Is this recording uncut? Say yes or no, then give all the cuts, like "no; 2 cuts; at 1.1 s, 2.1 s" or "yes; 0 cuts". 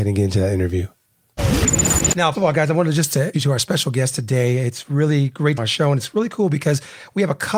no; 3 cuts; at 2.3 s, 3.3 s, 5.6 s